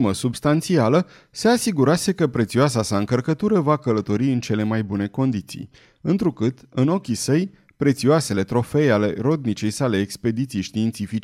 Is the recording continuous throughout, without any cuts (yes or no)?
yes